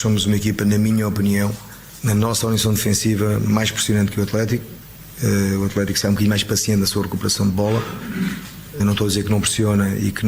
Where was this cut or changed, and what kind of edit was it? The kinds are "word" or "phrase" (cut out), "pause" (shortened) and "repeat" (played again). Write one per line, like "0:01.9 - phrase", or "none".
0:08.8 - word